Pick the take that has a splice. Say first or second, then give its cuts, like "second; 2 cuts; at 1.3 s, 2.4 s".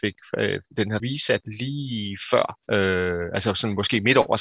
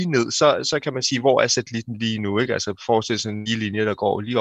first; 2 cuts; at 1.0 s, 2.6 s